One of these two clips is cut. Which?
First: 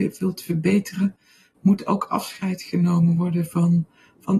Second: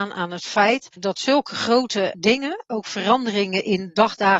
second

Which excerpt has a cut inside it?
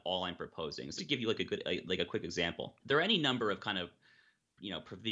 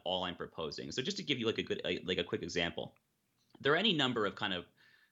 first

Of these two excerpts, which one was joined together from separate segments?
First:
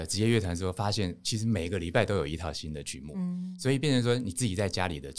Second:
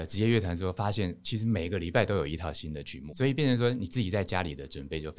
second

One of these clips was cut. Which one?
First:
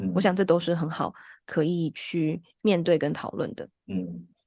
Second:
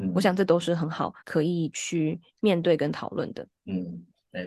second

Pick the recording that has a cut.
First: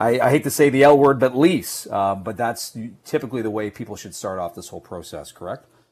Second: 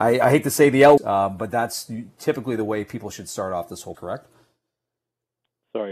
second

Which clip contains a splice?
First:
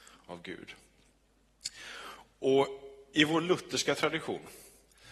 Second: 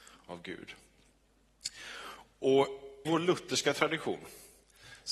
second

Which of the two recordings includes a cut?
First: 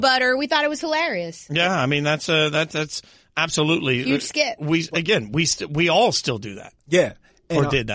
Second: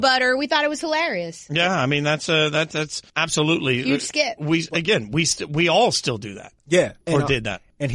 second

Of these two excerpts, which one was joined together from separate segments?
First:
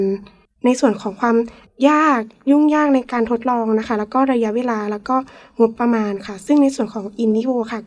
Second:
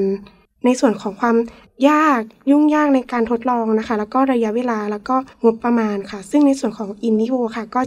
second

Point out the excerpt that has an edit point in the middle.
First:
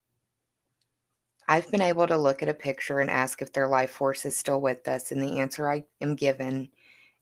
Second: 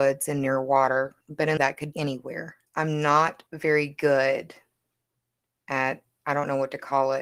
second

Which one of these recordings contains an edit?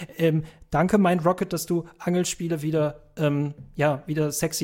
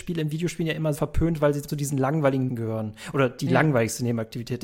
second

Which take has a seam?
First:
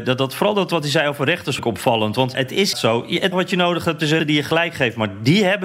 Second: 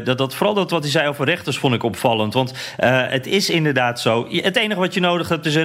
first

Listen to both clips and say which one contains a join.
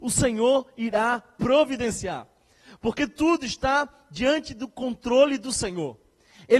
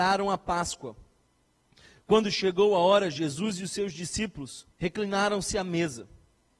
second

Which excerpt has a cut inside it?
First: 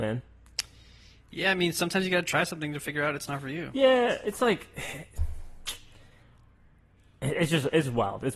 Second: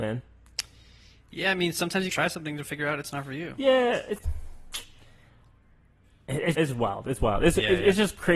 second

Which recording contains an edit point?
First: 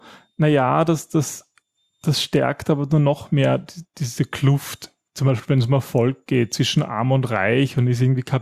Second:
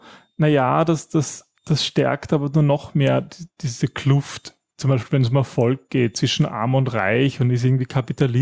second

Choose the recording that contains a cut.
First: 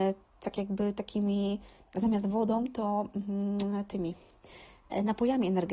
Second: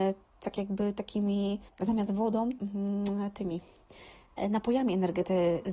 second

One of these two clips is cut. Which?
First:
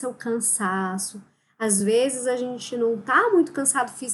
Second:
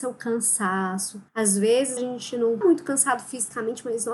second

